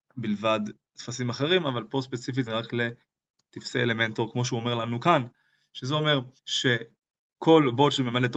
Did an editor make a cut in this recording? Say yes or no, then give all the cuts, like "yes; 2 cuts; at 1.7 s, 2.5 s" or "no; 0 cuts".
yes; 2 cuts; at 2.5 s, 6.4 s